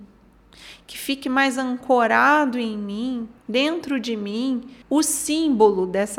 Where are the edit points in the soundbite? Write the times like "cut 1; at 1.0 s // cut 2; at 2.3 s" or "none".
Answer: cut 1; at 3.4 s // cut 2; at 4.8 s